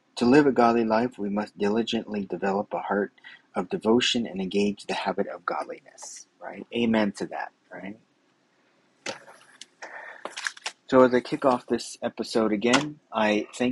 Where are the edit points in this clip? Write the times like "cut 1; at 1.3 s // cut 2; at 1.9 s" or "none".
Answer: none